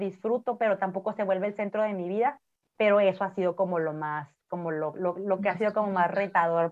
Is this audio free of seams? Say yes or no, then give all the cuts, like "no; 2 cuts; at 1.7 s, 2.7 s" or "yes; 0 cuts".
yes; 0 cuts